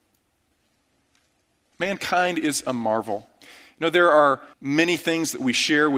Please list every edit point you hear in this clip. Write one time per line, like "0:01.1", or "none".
0:04.5